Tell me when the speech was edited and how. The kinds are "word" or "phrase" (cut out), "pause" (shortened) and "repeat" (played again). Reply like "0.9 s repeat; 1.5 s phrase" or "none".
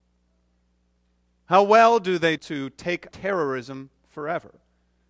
2.4 s word; 3.1 s word